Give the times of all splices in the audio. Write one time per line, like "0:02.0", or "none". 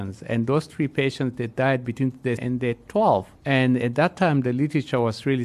0:02.4
0:03.4